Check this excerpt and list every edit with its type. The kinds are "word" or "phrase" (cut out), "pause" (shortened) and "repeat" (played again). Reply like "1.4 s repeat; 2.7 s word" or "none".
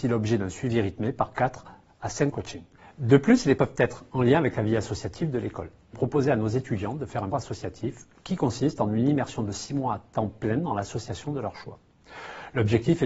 2.3 s phrase; 3.6 s word; 5.9 s phrase; 7.3 s word